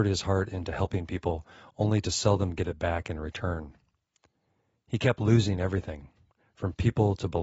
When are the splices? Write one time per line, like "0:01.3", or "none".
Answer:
none